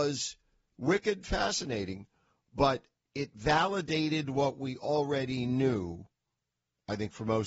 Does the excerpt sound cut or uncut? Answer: cut